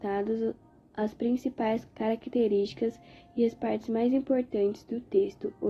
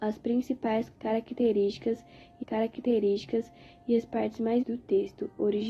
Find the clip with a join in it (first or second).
second